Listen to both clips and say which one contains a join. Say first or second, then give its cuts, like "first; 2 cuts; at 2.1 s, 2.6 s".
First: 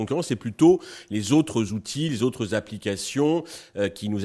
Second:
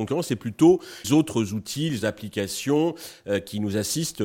second; 2 cuts; at 1.0 s, 2.0 s